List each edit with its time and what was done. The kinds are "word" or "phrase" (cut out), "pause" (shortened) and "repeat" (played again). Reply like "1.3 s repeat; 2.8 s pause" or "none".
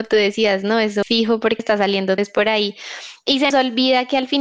1.0 s word; 1.6 s word; 2.2 s word; 3.5 s word